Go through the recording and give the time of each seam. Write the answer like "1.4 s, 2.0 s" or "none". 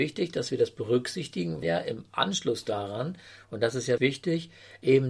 1.6 s, 4.0 s